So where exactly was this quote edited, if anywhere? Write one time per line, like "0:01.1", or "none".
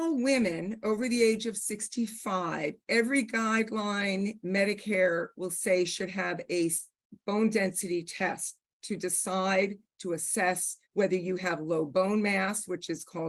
0:10.8